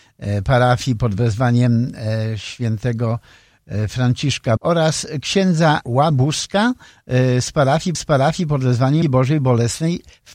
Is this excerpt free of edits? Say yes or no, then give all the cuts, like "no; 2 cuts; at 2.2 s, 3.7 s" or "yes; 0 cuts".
no; 4 cuts; at 4.6 s, 5.8 s, 7.9 s, 9.0 s